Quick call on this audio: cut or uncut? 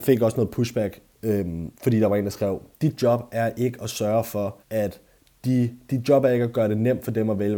cut